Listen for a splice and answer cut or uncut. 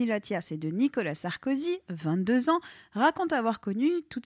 uncut